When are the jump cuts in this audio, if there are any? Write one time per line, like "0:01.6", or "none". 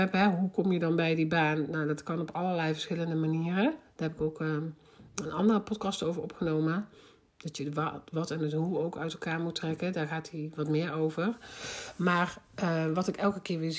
none